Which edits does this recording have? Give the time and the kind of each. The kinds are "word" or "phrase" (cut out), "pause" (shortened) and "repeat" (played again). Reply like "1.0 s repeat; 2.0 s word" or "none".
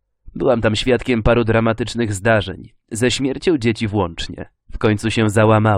4.6 s pause